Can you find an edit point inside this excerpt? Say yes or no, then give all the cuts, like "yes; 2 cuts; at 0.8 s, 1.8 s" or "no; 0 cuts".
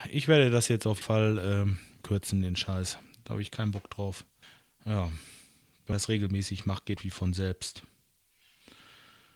yes; 5 cuts; at 1.0 s, 2.0 s, 4.4 s, 5.9 s, 7.0 s